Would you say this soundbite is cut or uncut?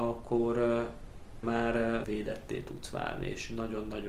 cut